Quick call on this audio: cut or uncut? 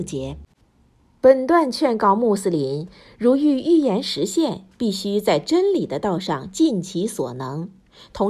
uncut